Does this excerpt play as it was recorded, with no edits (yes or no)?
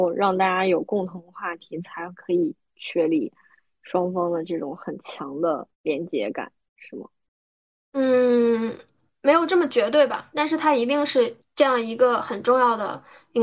no